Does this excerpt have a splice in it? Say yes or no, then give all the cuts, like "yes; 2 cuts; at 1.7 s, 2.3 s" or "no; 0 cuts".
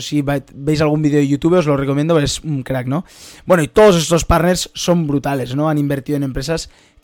no; 0 cuts